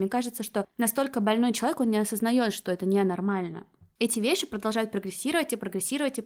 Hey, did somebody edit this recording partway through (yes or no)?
no